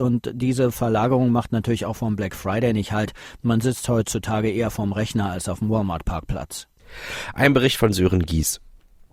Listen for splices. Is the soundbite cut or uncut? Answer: uncut